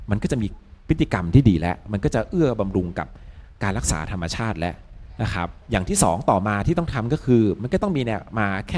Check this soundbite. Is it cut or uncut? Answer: cut